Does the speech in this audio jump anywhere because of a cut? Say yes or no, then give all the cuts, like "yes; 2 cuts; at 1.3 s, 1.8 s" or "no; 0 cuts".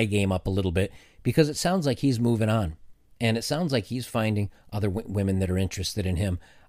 no; 0 cuts